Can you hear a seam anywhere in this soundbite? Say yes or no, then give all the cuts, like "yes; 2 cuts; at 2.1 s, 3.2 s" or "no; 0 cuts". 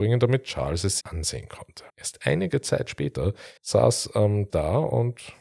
yes; 4 cuts; at 1.0 s, 1.9 s, 3.6 s, 4.5 s